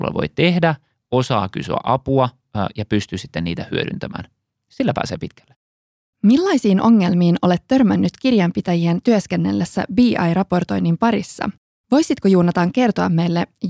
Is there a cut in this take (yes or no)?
no